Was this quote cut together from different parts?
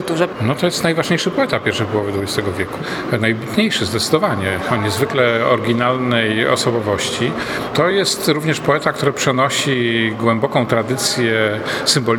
no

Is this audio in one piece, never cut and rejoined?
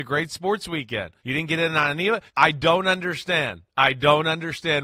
no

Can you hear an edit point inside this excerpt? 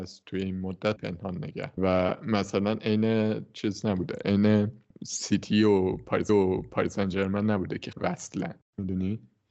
yes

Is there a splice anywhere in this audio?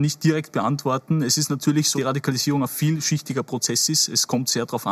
yes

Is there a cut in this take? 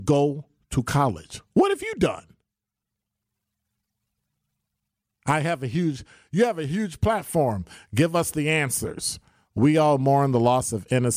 no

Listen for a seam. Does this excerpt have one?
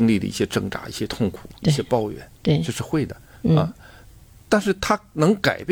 no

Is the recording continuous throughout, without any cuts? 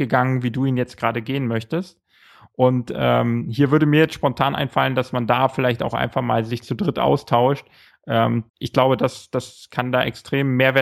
no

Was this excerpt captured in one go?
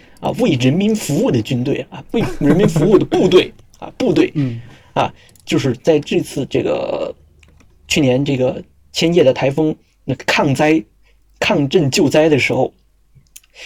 yes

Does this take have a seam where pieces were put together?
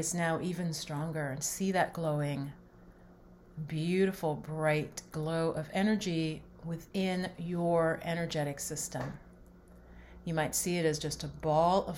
no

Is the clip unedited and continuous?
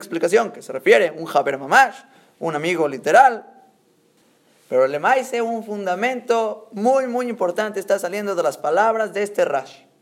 yes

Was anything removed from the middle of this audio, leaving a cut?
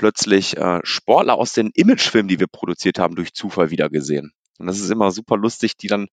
no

